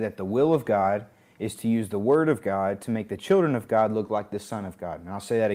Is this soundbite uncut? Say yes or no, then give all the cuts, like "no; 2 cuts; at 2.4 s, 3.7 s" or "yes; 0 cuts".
yes; 0 cuts